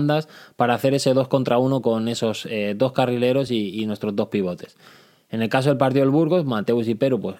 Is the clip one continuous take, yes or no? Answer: yes